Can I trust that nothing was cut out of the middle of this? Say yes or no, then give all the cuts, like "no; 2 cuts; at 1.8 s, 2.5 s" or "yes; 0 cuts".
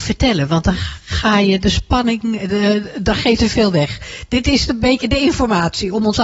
no; 2 cuts; at 3.4 s, 5.0 s